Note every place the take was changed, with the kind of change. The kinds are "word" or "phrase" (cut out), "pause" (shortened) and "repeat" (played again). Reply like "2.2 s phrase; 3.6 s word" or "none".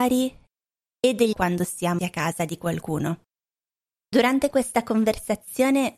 1.3 s phrase; 2.0 s word